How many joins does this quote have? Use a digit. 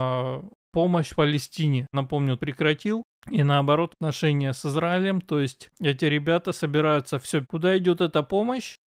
5